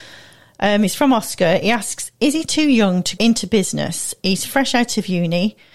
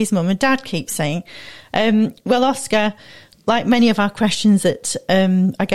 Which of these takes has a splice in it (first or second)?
first